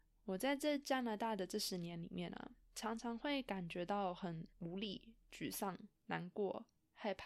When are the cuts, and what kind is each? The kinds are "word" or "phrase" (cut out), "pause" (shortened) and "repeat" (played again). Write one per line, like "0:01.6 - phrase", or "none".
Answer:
0:02.6 - pause
0:04.5 - pause
0:06.0 - pause

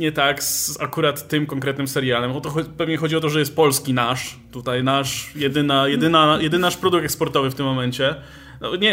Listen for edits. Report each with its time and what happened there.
none

